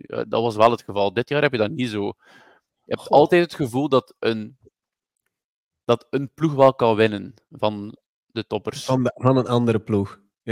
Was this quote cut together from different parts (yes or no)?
yes